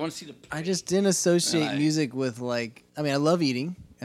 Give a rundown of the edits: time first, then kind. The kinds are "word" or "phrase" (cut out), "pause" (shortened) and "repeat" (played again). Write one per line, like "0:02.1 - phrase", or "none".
0:02.9 - pause